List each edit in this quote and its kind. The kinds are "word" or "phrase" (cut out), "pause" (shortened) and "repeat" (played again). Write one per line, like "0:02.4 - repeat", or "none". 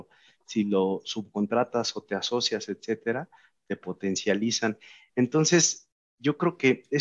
none